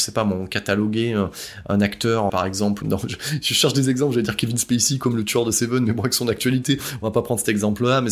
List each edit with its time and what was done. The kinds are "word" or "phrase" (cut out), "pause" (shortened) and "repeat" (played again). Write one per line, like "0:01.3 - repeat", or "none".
0:02.3 - word
0:02.8 - word